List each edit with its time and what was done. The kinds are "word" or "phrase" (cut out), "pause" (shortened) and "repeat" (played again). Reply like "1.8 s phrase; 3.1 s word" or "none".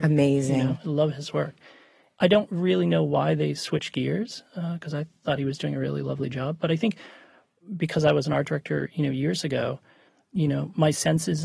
none